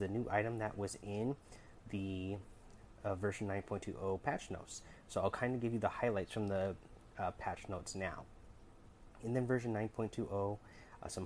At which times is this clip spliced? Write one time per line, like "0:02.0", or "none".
none

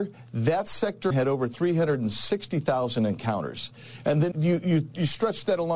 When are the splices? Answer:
0:01.1
0:04.3

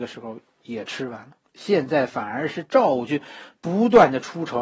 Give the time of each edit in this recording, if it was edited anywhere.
0:01.4

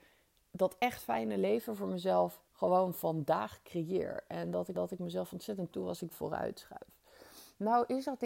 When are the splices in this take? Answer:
0:02.5
0:04.7
0:05.7
0:06.1

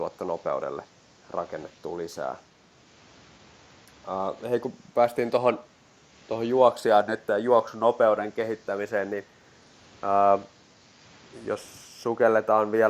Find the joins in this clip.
none

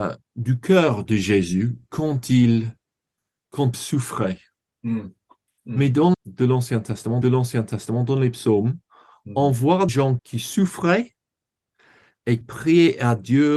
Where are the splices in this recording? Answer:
0:03.7
0:06.1
0:07.2
0:09.9
0:10.2
0:12.4

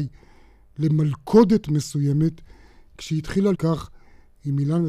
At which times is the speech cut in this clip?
0:03.5

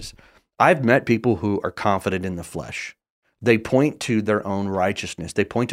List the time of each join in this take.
none

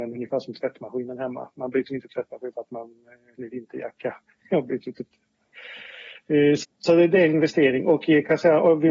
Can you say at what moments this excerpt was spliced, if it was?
0:01.9
0:02.5
0:03.3
0:06.6

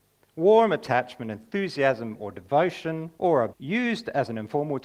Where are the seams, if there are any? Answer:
0:03.2
0:03.5

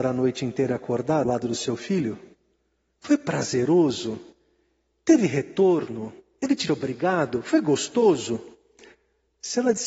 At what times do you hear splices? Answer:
0:01.2
0:06.7

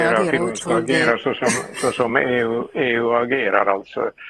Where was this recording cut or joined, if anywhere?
none

